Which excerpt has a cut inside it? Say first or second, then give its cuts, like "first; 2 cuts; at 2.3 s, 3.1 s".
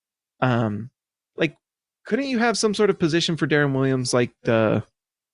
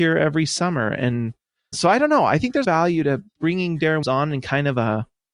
second; 3 cuts; at 1.7 s, 2.6 s, 4.0 s